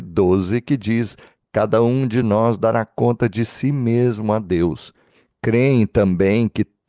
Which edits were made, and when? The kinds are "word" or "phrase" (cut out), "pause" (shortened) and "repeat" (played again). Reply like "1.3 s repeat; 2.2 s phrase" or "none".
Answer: none